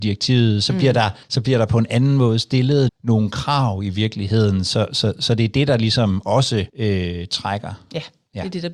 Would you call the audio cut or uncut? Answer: cut